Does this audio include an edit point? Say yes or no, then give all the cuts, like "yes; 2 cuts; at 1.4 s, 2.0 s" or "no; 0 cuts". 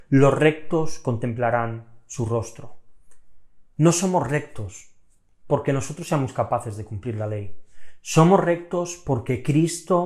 no; 0 cuts